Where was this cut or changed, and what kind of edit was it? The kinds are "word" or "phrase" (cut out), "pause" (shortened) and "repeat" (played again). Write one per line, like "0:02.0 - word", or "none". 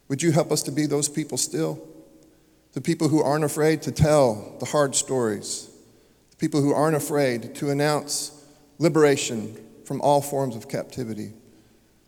none